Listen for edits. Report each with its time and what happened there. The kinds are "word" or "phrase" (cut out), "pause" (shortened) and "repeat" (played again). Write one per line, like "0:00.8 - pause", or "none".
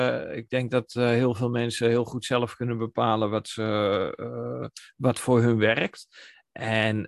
none